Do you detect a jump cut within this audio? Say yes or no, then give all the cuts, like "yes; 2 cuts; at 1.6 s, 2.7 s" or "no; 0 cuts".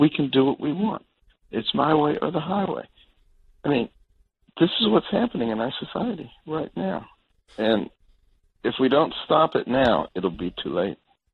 yes; 1 cut; at 10.1 s